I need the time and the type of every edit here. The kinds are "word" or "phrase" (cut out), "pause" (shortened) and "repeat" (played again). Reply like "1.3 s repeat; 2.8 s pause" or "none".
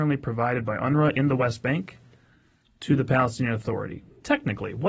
none